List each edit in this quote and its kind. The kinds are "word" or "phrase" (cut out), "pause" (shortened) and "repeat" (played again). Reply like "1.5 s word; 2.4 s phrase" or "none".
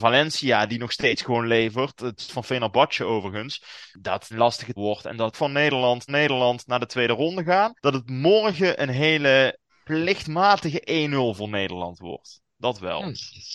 2.2 s word; 4.3 s phrase; 4.8 s word; 5.3 s phrase; 6.1 s repeat; 7.8 s pause; 9.7 s pause